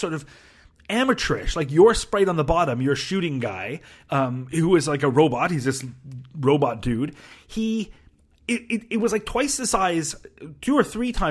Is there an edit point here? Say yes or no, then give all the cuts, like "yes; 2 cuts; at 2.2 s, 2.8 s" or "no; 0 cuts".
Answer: no; 0 cuts